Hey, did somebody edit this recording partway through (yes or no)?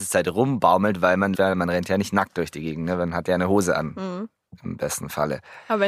yes